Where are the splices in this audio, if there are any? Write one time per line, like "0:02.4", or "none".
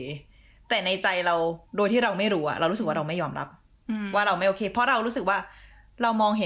0:01.7